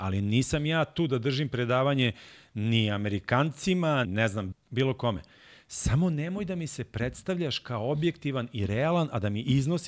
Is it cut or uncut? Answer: cut